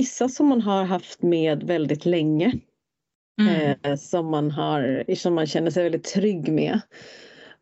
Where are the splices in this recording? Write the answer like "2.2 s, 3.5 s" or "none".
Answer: none

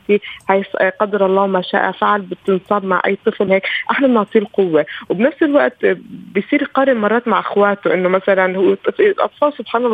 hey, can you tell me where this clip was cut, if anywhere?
3.5 s

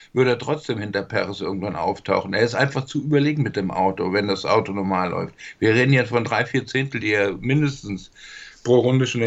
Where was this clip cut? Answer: none

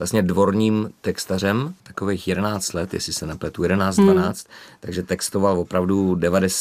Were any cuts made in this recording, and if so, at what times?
1.8 s

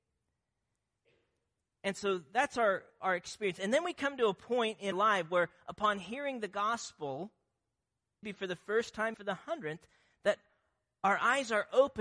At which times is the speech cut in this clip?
4.9 s, 8.2 s, 9.1 s

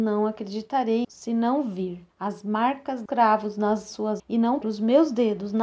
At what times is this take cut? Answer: 1.0 s, 2.1 s, 3.1 s, 4.2 s, 4.6 s

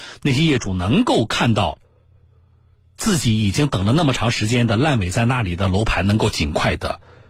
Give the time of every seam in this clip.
none

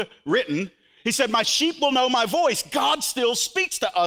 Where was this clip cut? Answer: none

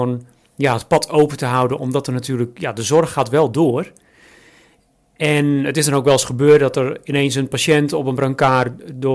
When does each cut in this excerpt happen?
none

